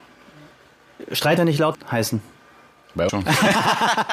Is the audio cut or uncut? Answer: cut